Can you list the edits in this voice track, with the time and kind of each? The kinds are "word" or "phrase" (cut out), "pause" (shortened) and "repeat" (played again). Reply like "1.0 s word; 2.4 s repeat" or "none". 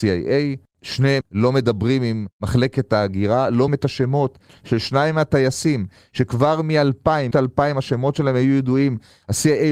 1.2 s word; 3.7 s word; 7.3 s word

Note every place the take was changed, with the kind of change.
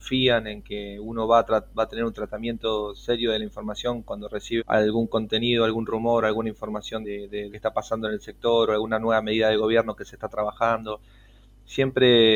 4.6 s word; 7.0 s word; 7.5 s phrase

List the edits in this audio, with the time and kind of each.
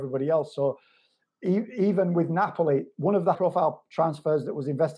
3.3 s word

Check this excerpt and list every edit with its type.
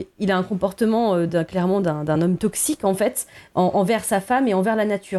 none

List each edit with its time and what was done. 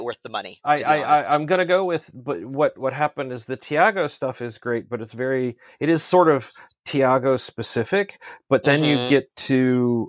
none

